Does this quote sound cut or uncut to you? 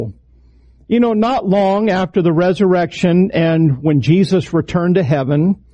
uncut